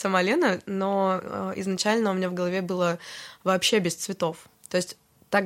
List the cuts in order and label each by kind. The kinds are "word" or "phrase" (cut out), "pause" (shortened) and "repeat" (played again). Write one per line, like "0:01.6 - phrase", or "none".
none